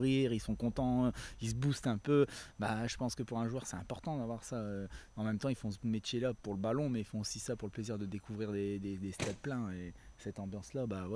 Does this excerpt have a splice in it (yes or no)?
no